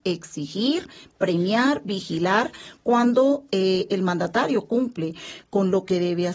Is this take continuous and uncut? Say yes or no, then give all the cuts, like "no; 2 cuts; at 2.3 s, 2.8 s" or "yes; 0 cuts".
yes; 0 cuts